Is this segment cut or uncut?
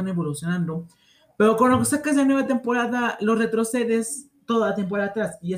uncut